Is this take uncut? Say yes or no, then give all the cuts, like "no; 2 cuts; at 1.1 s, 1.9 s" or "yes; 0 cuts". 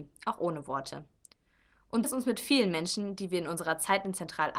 no; 1 cut; at 2.0 s